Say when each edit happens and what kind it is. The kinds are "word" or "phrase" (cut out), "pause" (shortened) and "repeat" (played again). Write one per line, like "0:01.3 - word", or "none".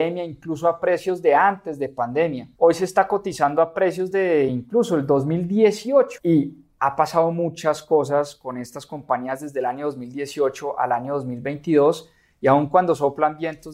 none